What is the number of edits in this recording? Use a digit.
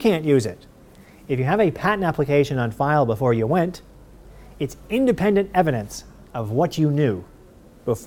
0